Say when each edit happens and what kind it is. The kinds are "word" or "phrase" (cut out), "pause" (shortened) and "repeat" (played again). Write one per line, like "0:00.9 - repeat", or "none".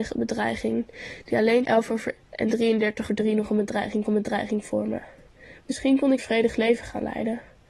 0:01.6 - word
0:02.2 - word
0:03.1 - word
0:04.1 - repeat
0:06.2 - word